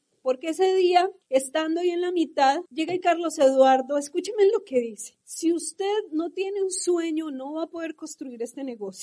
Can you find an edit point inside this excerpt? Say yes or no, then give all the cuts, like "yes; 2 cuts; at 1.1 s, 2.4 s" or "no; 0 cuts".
yes; 4 cuts; at 1.2 s, 2.7 s, 3.0 s, 5.2 s